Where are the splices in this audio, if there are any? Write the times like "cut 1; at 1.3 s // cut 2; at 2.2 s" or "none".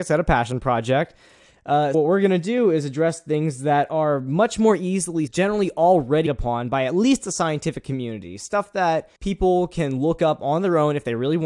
cut 1; at 1.9 s // cut 2; at 5.3 s // cut 3; at 6.3 s // cut 4; at 9.2 s